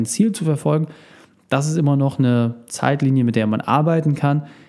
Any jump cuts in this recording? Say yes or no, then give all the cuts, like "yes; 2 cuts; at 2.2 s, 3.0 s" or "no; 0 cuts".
no; 0 cuts